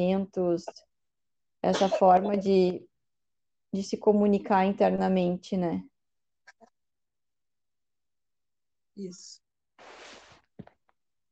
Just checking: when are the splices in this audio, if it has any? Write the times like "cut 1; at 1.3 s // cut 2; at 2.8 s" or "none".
none